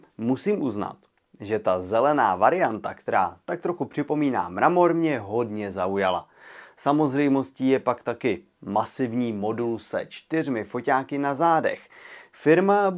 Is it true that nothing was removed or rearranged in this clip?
yes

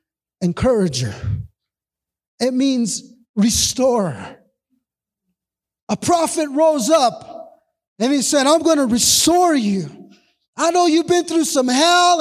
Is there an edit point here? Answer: no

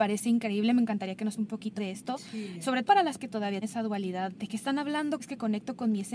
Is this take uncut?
no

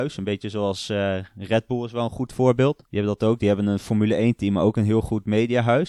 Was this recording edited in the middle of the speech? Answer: yes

